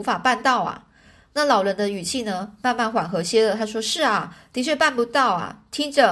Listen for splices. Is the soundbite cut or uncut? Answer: uncut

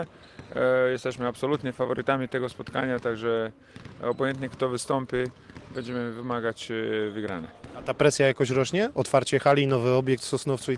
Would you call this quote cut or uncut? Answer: uncut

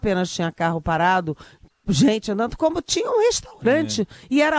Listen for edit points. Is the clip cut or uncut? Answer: uncut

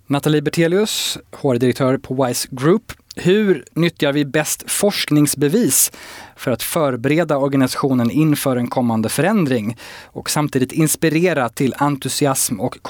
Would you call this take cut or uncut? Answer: uncut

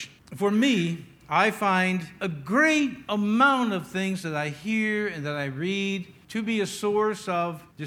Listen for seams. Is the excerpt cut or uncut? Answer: uncut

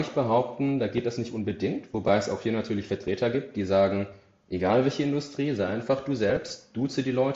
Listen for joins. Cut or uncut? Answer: uncut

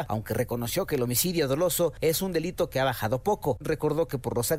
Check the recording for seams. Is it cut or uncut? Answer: uncut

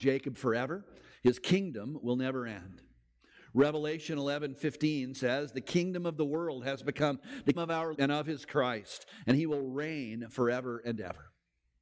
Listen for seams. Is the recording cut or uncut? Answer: cut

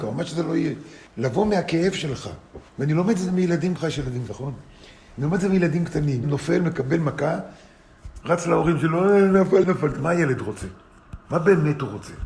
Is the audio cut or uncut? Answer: cut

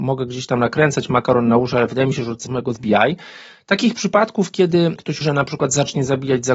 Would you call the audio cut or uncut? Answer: cut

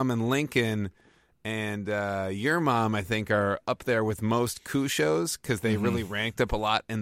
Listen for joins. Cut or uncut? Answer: uncut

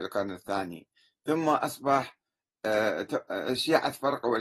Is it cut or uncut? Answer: uncut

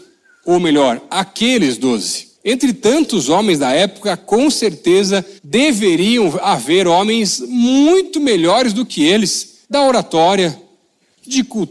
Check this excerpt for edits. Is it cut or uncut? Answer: cut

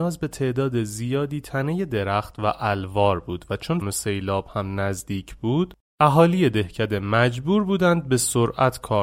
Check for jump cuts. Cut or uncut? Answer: cut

